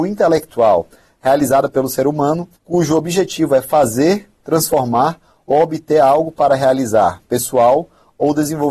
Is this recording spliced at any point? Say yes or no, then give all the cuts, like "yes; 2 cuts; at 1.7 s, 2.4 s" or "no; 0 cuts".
yes; 1 cut; at 2.6 s